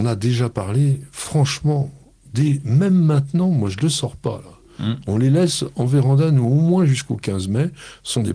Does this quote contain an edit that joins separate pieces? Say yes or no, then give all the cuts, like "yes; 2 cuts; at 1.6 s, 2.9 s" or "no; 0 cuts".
no; 0 cuts